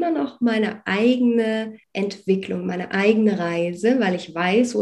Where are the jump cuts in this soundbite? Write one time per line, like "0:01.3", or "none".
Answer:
0:01.8